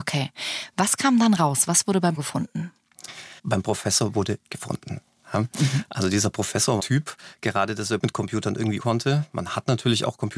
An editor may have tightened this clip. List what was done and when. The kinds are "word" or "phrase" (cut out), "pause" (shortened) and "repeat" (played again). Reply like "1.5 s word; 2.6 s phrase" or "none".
2.2 s word; 3.4 s pause; 4.5 s word; 6.8 s phrase; 8.0 s word; 8.8 s word